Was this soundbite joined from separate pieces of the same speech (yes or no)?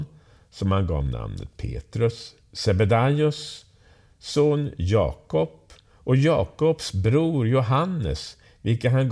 no